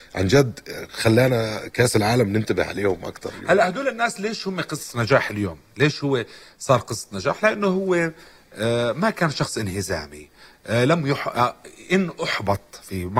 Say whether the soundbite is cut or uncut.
uncut